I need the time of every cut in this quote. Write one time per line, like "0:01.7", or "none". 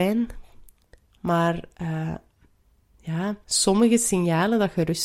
0:03.4